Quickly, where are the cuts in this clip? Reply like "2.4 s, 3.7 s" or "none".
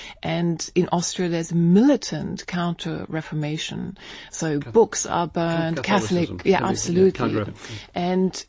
7.5 s